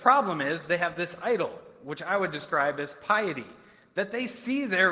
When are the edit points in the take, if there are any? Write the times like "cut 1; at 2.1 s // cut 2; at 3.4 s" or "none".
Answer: none